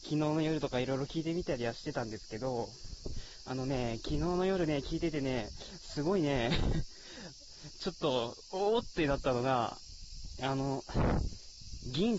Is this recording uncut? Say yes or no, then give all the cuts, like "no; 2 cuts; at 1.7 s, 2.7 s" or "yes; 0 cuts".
yes; 0 cuts